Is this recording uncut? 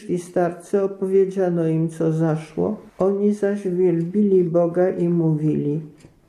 no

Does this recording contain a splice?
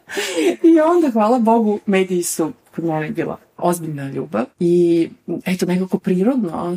yes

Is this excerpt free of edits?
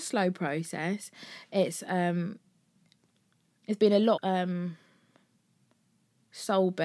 no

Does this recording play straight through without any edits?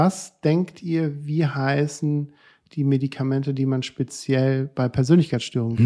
yes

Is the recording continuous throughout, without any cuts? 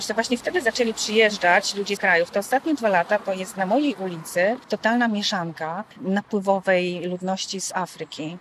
no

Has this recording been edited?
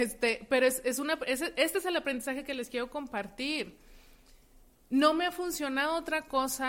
no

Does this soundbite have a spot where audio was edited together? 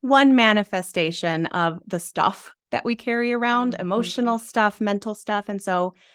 no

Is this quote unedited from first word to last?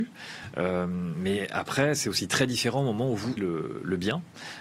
no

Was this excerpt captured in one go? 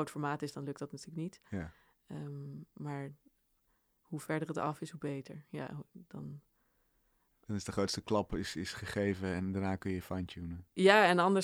yes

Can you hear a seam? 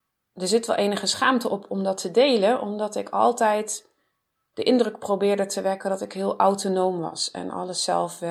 no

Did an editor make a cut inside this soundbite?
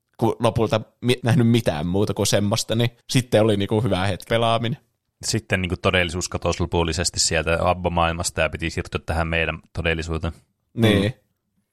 yes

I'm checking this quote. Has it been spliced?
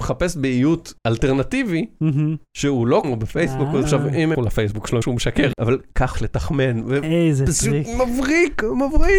yes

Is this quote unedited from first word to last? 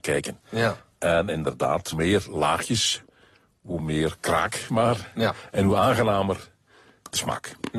no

